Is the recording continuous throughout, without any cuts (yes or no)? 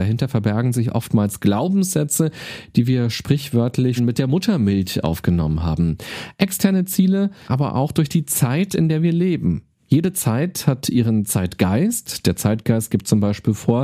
no